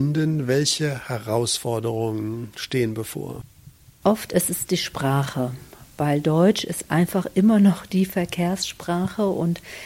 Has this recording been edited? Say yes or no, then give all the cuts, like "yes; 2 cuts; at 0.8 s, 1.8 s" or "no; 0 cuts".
no; 0 cuts